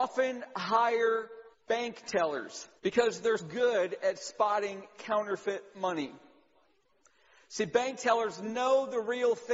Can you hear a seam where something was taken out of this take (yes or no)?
yes